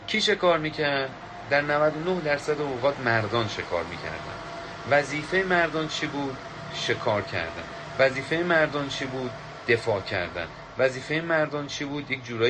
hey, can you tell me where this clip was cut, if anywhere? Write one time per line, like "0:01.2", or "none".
none

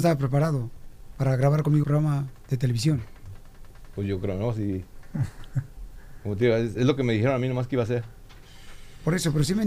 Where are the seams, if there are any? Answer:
0:01.8
0:06.8

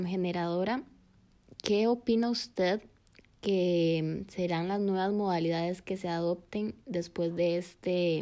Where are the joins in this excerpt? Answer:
none

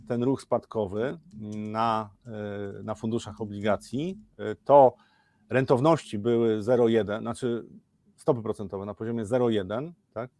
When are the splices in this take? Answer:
none

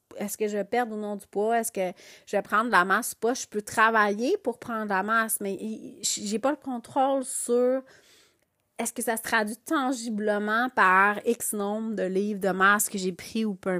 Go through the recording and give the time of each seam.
none

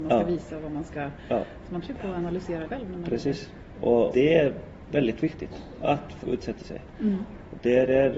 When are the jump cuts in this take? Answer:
0:01.8
0:02.6
0:04.1
0:06.2

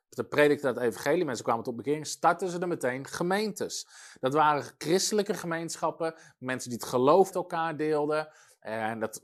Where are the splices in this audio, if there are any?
0:07.3

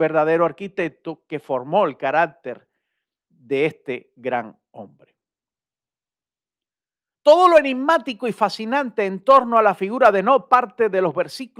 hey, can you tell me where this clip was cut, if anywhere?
none

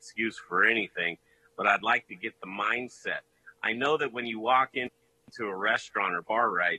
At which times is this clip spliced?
none

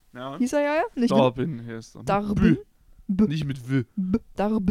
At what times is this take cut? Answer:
0:01.1

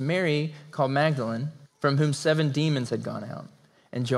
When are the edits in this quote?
0:01.6

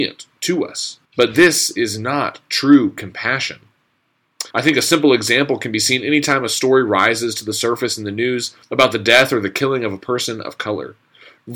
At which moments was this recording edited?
0:01.0
0:04.5
0:08.6

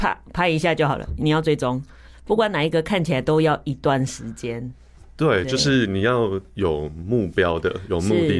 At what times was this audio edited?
none

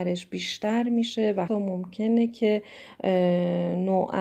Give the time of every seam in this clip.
0:01.5

